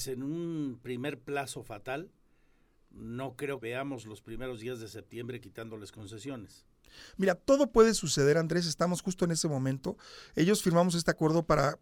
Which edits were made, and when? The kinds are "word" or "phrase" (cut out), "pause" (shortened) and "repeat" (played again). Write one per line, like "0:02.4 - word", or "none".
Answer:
0:03.6 - word